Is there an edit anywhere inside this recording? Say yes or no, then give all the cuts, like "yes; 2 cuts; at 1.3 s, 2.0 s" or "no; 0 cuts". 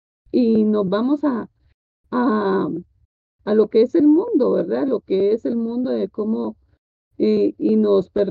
no; 0 cuts